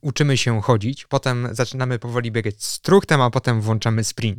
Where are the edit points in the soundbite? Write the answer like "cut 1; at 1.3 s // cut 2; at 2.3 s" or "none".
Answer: none